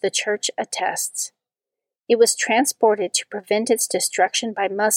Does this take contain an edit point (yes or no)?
no